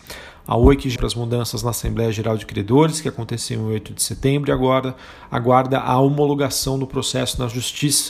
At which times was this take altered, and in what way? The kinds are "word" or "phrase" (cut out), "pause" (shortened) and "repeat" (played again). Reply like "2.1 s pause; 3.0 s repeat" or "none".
1.0 s phrase